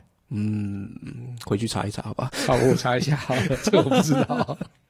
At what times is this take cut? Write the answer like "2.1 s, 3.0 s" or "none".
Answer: none

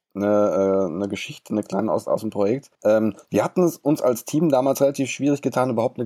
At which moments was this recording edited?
2.7 s

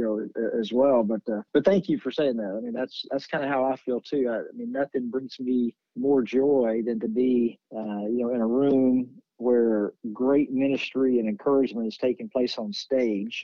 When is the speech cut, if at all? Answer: 1.5 s, 5.8 s, 7.6 s

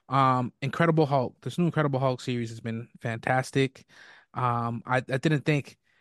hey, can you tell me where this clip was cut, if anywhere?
none

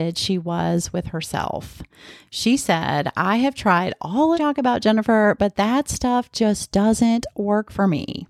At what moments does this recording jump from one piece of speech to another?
4.3 s

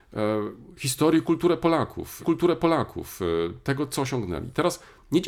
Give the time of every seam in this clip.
2.2 s

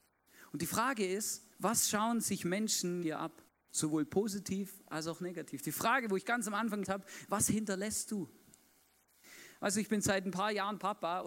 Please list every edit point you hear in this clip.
1.5 s, 3.0 s, 3.5 s, 6.8 s

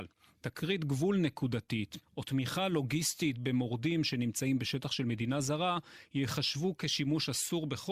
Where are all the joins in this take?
none

